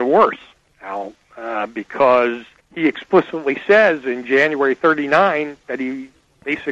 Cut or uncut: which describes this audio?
cut